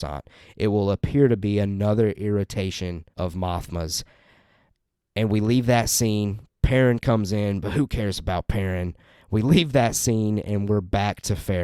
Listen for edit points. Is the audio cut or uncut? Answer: cut